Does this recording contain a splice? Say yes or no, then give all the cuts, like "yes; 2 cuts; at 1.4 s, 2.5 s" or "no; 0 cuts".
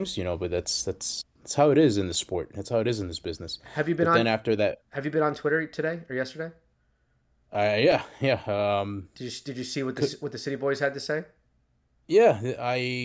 no; 0 cuts